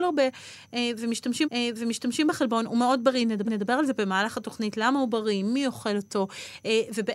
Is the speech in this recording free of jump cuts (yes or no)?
no